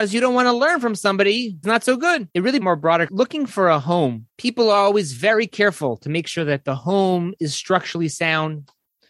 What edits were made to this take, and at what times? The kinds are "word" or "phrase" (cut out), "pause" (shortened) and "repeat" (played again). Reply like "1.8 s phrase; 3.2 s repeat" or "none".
1.6 s word; 2.3 s pause; 2.6 s phrase; 3.1 s phrase; 4.3 s pause